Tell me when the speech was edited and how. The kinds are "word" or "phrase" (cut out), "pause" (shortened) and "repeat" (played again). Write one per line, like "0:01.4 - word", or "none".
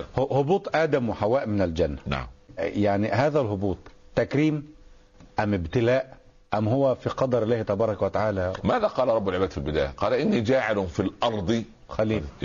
0:02.6 - word
0:08.6 - word